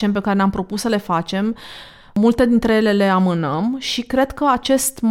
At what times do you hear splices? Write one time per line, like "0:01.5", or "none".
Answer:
none